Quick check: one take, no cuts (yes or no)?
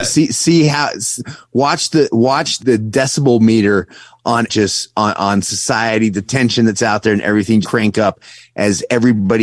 no